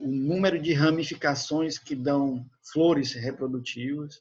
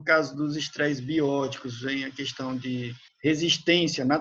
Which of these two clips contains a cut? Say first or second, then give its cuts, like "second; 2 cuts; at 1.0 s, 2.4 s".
second; 1 cut; at 3.1 s